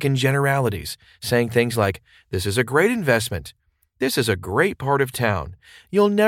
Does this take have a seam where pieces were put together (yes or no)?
no